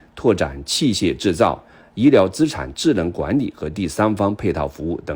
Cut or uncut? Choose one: uncut